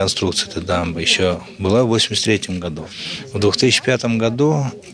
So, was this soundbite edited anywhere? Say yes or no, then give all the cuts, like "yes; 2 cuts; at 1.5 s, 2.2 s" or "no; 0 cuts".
no; 0 cuts